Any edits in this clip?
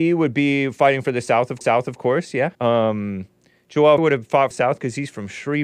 yes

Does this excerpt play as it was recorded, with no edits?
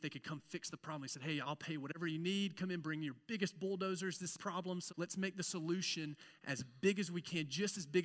no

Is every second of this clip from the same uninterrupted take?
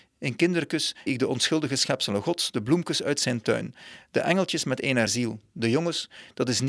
no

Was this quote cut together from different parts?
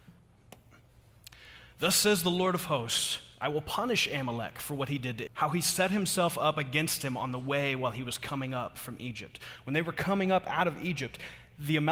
yes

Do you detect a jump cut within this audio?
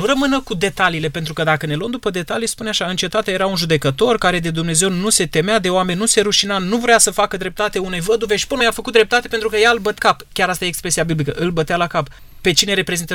yes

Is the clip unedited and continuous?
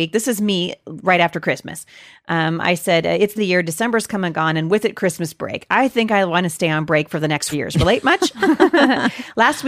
no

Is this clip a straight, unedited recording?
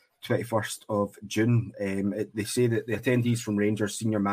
yes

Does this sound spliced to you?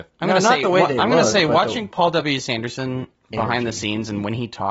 no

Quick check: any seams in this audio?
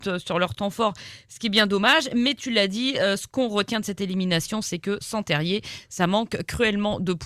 no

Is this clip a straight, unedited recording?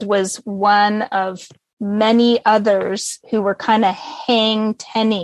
yes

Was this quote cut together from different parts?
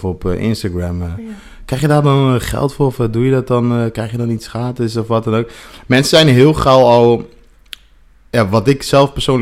no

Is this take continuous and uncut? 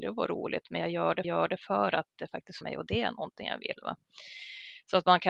no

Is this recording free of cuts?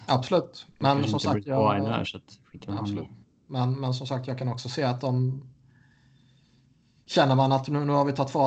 yes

